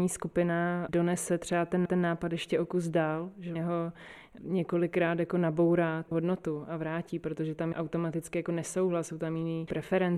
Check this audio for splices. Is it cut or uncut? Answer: cut